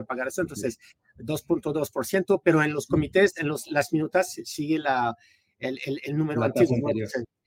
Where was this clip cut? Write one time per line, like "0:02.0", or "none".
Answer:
none